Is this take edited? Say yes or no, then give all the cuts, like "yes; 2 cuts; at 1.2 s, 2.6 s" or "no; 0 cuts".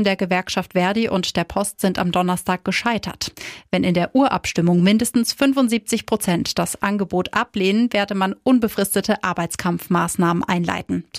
no; 0 cuts